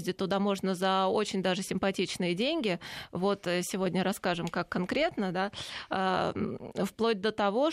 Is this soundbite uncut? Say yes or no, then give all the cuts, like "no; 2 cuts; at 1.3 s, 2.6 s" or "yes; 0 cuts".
yes; 0 cuts